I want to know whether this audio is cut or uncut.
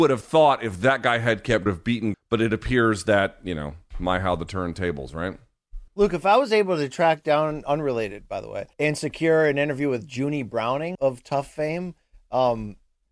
cut